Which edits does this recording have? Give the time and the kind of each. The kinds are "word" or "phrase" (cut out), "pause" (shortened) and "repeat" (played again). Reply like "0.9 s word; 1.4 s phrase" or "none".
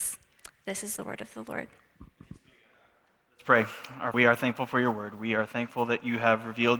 4.1 s word